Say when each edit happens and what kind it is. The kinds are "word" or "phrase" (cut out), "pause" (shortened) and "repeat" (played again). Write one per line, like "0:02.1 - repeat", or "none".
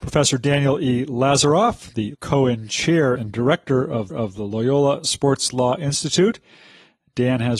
0:02.1 - word
0:03.2 - phrase
0:04.1 - repeat